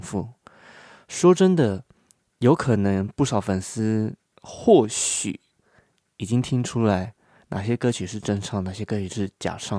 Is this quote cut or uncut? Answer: uncut